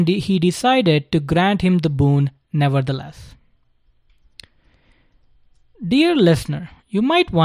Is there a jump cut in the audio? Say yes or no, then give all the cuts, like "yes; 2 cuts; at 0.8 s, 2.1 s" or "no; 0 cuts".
no; 0 cuts